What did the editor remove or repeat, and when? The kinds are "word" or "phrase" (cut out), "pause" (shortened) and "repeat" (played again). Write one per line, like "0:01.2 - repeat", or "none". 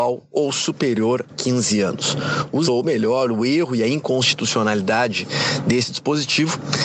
0:01.3 - word
0:02.6 - word

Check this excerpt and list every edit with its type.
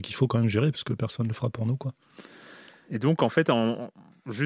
none

